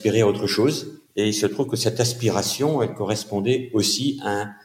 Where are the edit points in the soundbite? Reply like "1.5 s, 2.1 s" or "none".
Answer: 1.1 s